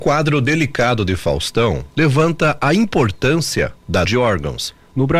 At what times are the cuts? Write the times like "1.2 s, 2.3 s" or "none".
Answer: 4.1 s

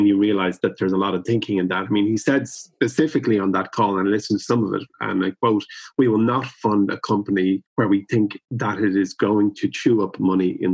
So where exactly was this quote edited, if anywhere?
7.7 s, 8.5 s

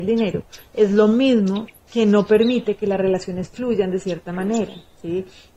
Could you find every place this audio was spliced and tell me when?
none

